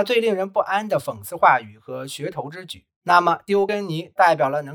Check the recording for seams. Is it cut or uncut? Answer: cut